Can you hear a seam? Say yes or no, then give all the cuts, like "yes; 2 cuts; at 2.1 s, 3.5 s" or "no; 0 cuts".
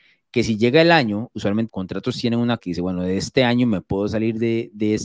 yes; 2 cuts; at 1.7 s, 2.6 s